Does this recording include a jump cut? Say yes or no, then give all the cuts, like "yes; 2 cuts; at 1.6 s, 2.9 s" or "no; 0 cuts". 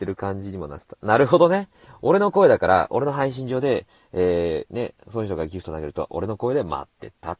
no; 0 cuts